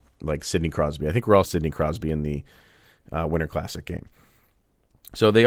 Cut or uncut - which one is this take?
cut